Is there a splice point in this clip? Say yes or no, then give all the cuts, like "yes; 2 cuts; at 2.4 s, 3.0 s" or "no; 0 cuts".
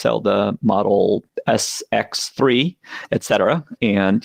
no; 0 cuts